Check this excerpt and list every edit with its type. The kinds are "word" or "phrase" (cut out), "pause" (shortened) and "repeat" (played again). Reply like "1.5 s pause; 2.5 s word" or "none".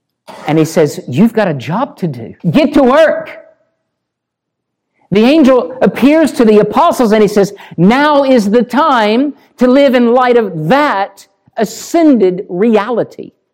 2.4 s pause